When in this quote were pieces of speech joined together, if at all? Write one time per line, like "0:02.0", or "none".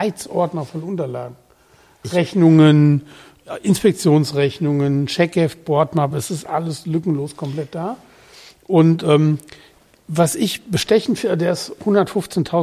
none

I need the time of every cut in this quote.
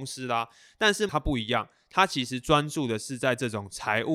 0:01.1

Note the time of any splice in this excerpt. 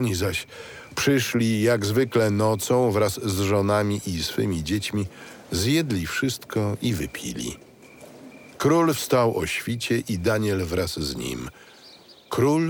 none

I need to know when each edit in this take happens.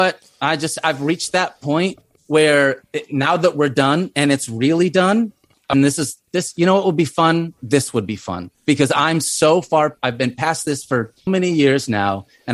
0:02.2
0:05.7
0:08.5
0:11.3

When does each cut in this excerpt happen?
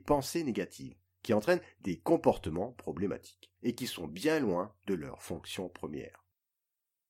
none

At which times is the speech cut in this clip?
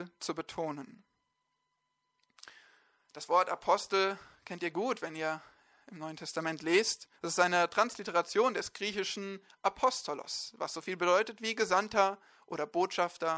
0:07.2

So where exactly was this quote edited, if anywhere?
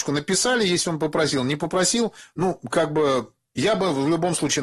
none

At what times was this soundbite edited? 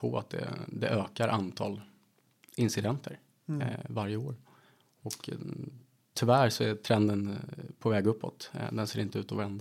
none

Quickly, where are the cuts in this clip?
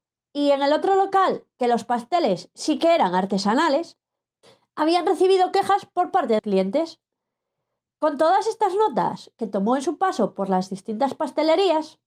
0:04.4
0:06.4

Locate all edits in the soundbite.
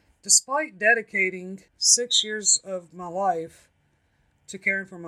0:01.7

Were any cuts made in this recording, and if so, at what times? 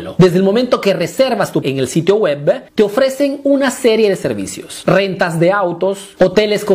0:01.6
0:02.7

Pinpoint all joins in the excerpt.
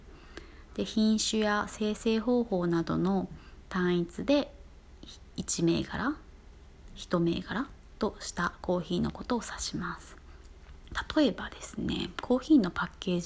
0:05.3

